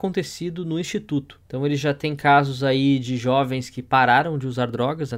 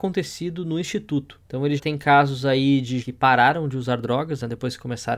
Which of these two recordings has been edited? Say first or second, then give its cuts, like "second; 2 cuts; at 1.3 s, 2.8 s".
second; 2 cuts; at 1.8 s, 3.0 s